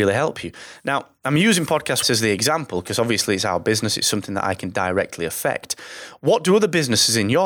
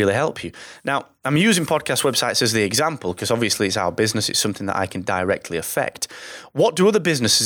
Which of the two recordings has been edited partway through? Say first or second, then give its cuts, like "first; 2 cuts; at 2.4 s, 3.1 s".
first; 1 cut; at 2.0 s